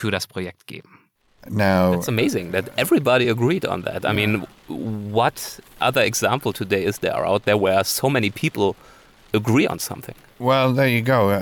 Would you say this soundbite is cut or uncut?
uncut